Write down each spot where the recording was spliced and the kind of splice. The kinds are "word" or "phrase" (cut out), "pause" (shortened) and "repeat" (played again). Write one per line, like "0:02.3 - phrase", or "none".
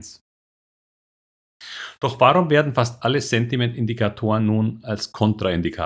none